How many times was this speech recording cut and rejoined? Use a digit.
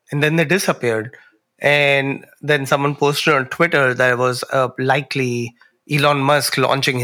0